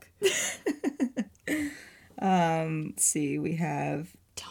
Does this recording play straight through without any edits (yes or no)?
no